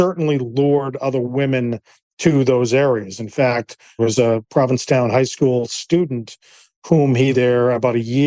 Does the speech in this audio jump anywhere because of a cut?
yes; 2 cuts; at 4.0 s, 7.3 s

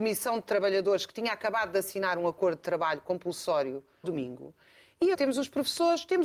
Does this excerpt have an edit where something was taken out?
yes; 2 cuts; at 4.0 s, 5.1 s

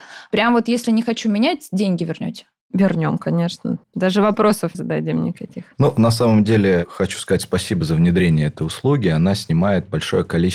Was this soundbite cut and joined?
yes; 2 cuts; at 3.8 s, 4.7 s

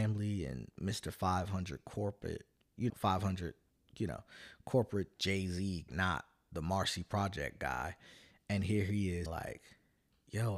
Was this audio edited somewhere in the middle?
yes; 4 cuts; at 2.9 s, 5.2 s, 5.9 s, 9.3 s

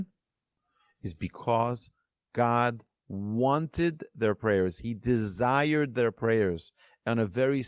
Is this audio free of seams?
yes; 0 cuts

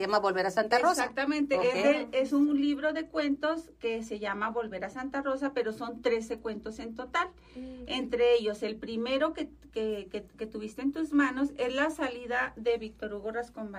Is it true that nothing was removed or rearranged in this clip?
yes; 0 cuts

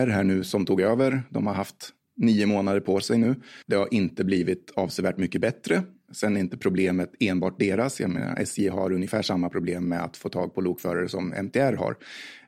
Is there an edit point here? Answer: yes; 1 cut; at 3.6 s

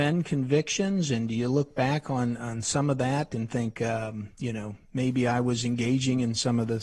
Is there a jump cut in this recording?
no; 0 cuts

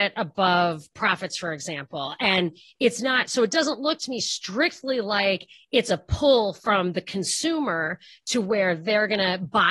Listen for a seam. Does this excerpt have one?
no; 0 cuts

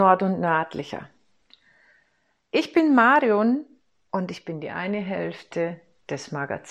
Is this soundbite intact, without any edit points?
yes; 0 cuts

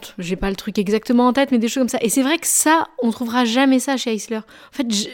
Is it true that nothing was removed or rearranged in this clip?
yes; 0 cuts

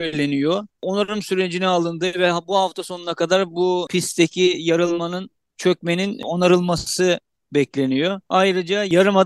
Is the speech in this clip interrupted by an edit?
no; 0 cuts

